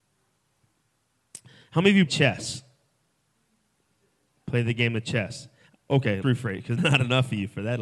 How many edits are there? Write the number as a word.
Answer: three